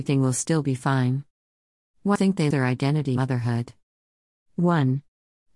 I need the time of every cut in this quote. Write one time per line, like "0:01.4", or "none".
0:02.2
0:02.5
0:03.2